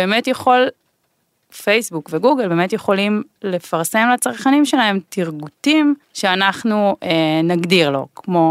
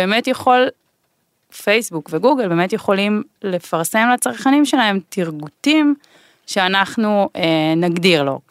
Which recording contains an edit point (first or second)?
first